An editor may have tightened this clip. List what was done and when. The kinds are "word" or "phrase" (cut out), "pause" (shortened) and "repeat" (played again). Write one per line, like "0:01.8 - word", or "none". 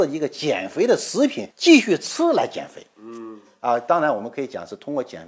0:01.5 - pause